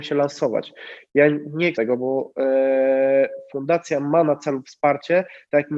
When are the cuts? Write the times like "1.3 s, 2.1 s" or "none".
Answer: 1.7 s